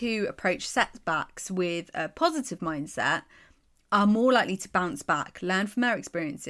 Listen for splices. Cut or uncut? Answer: uncut